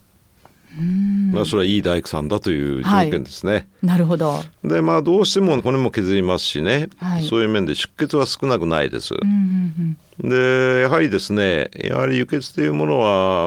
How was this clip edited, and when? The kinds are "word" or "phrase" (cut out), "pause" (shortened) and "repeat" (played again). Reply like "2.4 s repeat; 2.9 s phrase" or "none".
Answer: 4.6 s pause; 5.6 s word

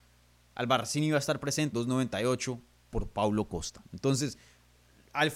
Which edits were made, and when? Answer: 1.7 s word

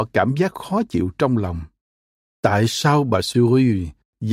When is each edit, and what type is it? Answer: none

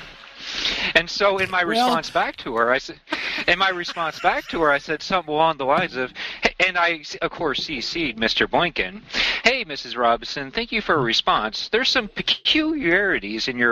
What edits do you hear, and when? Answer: none

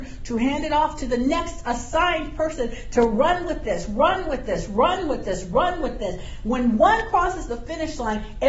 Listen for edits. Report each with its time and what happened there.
none

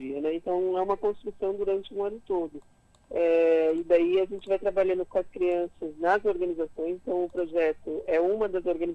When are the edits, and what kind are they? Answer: 2.9 s pause

